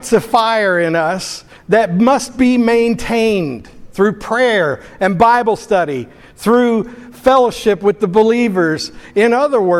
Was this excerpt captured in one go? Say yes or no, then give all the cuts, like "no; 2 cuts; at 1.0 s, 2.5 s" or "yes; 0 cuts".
yes; 0 cuts